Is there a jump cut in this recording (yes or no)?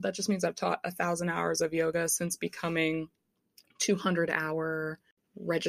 no